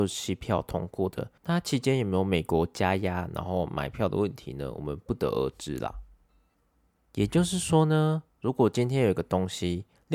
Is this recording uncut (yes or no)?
no